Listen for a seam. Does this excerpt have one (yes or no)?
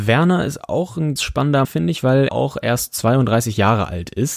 yes